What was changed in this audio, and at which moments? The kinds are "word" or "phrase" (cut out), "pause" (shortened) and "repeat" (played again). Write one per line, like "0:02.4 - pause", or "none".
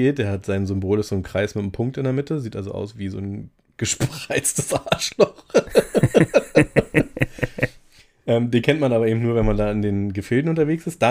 none